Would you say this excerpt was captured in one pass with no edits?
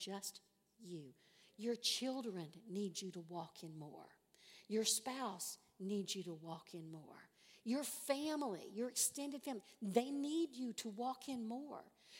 yes; 0 cuts

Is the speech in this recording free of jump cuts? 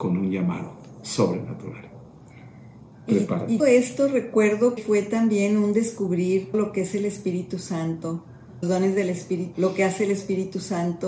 no; 5 cuts; at 3.6 s, 4.8 s, 6.5 s, 8.6 s, 9.5 s

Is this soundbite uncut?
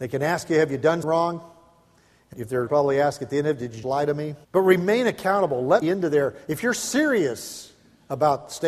no; 6 cuts; at 1.0 s, 2.3 s, 2.7 s, 3.8 s, 4.4 s, 5.8 s

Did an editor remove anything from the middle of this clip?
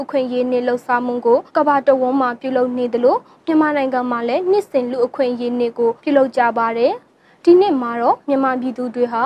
yes; 2 cuts; at 1.5 s, 6.0 s

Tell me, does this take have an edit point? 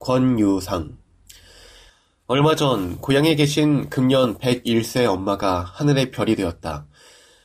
no; 0 cuts

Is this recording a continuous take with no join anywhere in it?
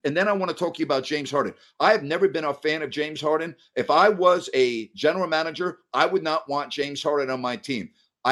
yes; 0 cuts

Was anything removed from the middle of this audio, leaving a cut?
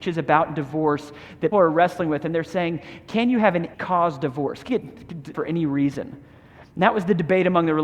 yes; 4 cuts; at 1.5 s, 3.7 s, 4.7 s, 5.3 s

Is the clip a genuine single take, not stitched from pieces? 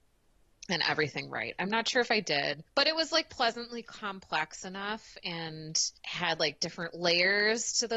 no; 2 cuts; at 2.7 s, 6.0 s

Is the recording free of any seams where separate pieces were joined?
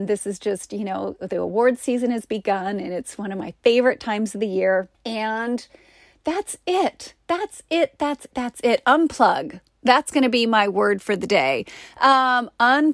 no; 2 cuts; at 4.9 s, 8.3 s

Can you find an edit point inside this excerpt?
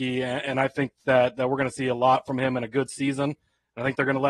no; 0 cuts

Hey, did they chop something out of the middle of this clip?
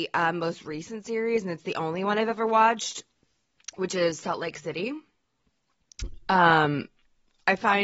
no; 0 cuts

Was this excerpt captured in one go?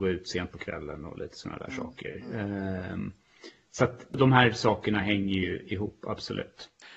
yes; 0 cuts

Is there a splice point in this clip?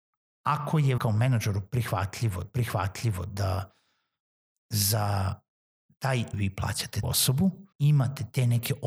yes; 5 cuts; at 1.0 s, 2.4 s, 6.3 s, 7.0 s, 7.7 s

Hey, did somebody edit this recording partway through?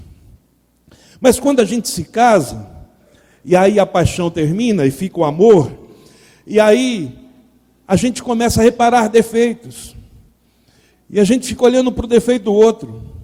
no; 0 cuts

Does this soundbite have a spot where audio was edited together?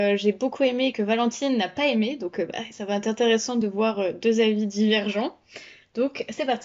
no; 0 cuts

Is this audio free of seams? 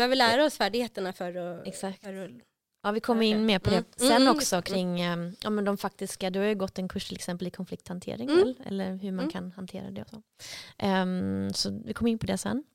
yes; 0 cuts

